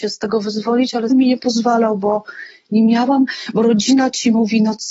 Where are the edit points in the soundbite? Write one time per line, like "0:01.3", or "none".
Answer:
0:01.1